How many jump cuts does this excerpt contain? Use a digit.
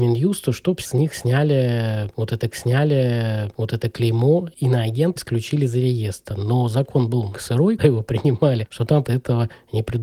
5